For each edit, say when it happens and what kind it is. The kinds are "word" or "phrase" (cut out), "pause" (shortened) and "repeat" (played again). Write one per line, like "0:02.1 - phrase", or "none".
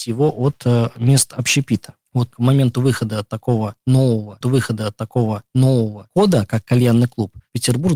0:02.3 - word
0:04.4 - repeat